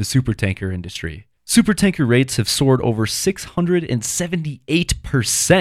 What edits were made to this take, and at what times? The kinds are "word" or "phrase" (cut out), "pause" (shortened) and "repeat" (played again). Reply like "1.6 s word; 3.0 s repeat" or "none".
1.4 s pause